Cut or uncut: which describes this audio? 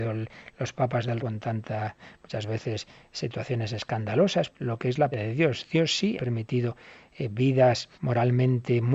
cut